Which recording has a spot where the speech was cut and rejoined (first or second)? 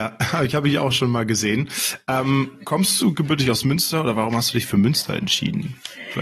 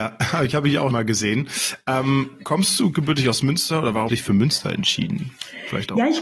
second